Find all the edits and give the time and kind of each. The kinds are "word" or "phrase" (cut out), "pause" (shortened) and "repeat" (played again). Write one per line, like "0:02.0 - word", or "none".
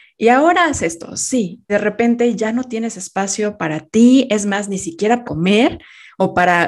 0:01.7 - word
0:05.2 - word

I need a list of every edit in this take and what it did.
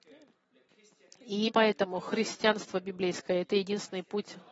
0:01.5 - word

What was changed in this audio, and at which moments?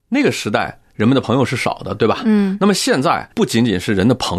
0:03.3 - pause

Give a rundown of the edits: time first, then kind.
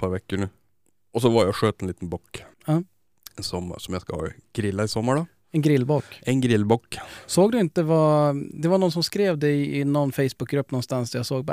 0:02.5 - pause

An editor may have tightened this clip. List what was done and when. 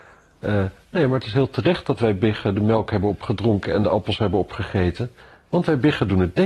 none

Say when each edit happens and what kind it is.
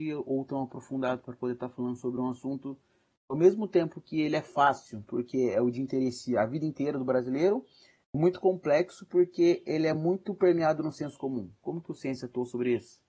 none

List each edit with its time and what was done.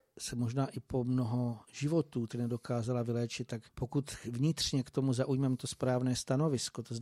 0:02.3 - word
0:03.7 - pause

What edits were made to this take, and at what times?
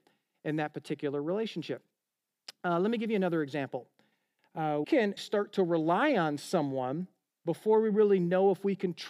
0:04.8 - word
0:05.2 - word

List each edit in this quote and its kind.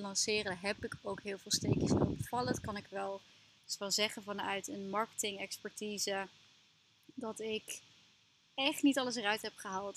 none

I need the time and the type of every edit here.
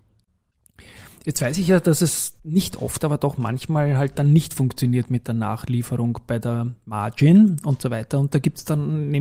0:02.4 - pause

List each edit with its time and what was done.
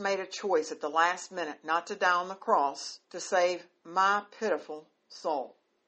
0:03.0 - pause

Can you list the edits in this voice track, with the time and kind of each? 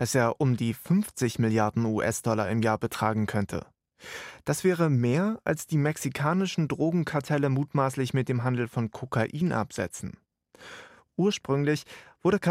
none

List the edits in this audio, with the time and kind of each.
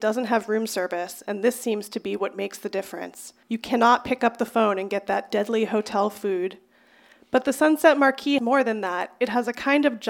0:03.4 - pause
0:08.4 - word

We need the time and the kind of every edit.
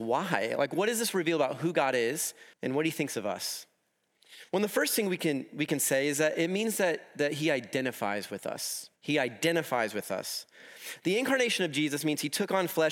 0:02.5 - pause
0:09.0 - pause

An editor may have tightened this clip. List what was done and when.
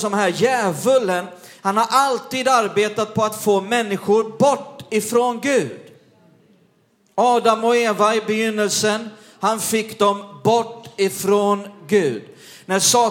none

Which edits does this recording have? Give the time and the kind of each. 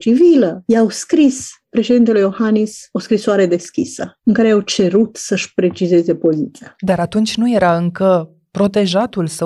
none

